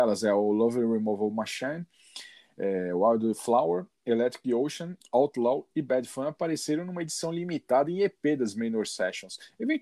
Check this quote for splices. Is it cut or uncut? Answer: uncut